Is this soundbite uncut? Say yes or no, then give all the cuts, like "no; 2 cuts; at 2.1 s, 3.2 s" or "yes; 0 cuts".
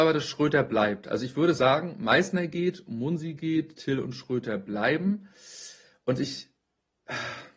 yes; 0 cuts